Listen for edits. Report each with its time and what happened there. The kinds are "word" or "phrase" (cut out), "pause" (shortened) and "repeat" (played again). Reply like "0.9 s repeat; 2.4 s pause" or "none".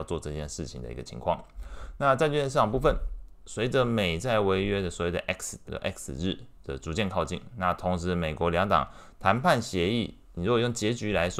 5.6 s word